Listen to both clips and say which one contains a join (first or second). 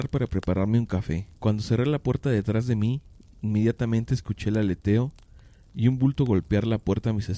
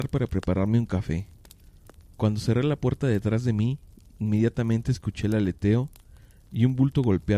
first